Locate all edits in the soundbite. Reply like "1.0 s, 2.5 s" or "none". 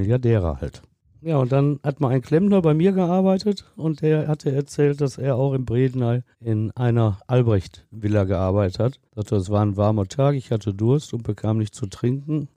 6.3 s, 9.1 s